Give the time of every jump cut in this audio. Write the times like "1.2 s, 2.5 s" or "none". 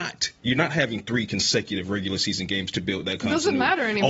none